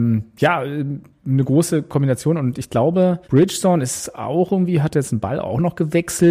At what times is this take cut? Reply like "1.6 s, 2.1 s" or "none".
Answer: 3.2 s